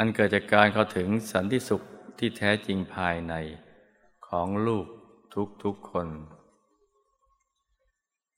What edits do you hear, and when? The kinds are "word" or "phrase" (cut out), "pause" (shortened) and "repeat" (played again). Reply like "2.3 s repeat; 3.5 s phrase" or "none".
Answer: none

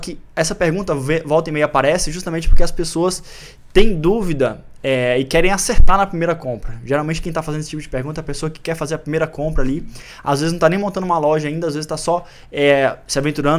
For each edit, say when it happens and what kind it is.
none

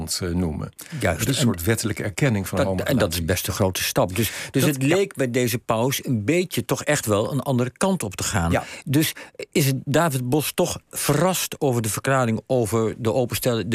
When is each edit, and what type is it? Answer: 10.9 s pause

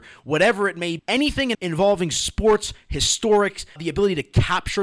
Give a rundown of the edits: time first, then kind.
1.0 s word; 1.5 s word; 3.8 s word

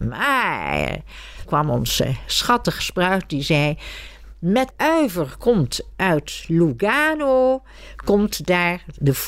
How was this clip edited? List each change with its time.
1.4 s word; 2.8 s phrase; 4.7 s word

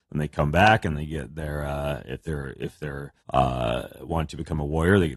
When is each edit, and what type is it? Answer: 3.2 s pause

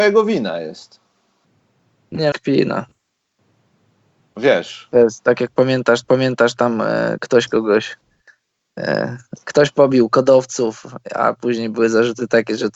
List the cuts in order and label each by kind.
2.3 s phrase; 6.0 s repeat

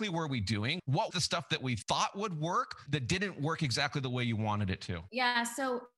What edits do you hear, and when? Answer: 1.1 s word; 2.9 s word

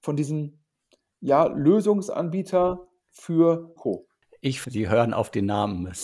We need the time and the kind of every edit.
3.8 s phrase; 4.6 s word

